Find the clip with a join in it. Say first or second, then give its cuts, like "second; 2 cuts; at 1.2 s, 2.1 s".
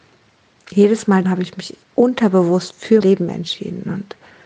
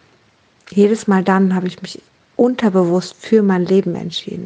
first; 3 cuts; at 1.2 s, 1.8 s, 3.0 s